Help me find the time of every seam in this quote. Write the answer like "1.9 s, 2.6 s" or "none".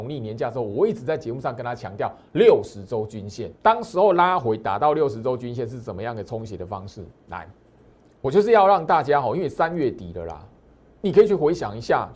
3.6 s, 7.2 s